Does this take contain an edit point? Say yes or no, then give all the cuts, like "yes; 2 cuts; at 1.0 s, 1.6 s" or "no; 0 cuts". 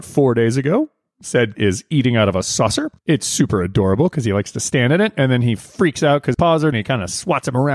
yes; 4 cuts; at 1.5 s, 3.0 s, 6.3 s, 6.7 s